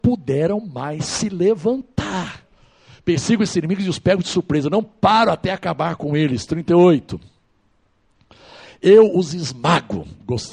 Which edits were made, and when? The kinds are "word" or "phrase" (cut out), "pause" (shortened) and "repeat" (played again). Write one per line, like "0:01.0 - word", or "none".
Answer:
none